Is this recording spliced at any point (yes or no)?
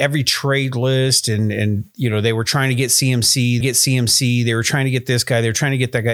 yes